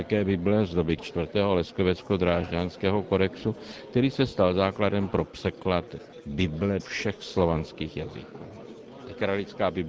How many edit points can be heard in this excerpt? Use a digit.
2